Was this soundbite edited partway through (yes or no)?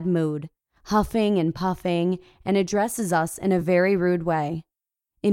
no